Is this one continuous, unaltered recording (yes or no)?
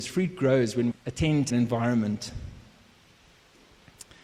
no